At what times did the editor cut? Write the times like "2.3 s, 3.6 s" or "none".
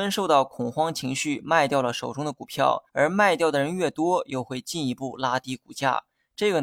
2.9 s